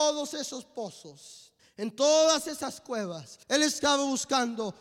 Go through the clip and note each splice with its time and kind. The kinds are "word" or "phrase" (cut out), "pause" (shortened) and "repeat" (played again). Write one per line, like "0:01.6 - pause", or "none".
0:01.6 - pause
0:03.4 - pause